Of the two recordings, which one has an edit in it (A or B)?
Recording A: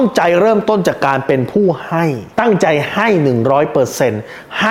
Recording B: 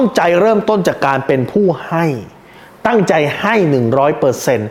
A